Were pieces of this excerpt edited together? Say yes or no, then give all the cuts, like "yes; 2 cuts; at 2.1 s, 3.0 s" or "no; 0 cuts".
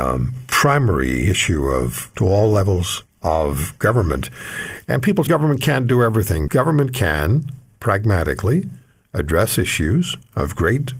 yes; 3 cuts; at 2.1 s, 5.3 s, 6.5 s